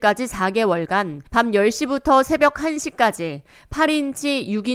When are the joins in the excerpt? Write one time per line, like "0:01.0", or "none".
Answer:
0:01.3